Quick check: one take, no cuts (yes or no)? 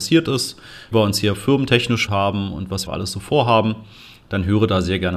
no